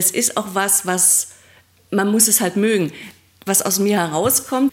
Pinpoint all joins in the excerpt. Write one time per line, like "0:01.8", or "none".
none